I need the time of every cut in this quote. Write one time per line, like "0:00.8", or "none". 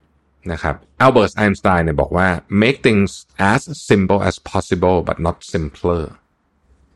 none

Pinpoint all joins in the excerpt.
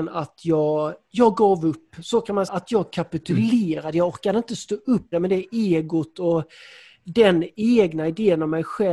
0:01.0
0:02.5
0:05.1

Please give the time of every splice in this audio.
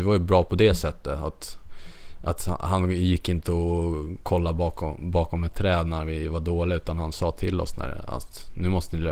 none

